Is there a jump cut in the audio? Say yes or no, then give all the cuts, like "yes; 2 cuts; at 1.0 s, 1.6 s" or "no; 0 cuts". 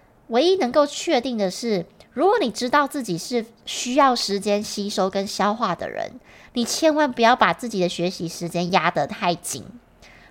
no; 0 cuts